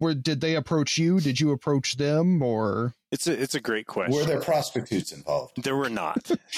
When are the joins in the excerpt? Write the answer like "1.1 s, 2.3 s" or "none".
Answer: none